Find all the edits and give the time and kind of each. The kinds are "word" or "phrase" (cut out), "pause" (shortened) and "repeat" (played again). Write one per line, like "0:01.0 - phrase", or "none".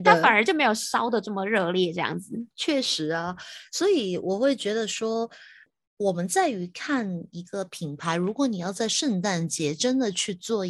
0:02.5 - pause